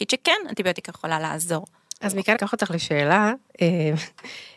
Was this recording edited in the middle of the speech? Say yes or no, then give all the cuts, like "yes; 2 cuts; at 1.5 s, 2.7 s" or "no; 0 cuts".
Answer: yes; 1 cut; at 2.3 s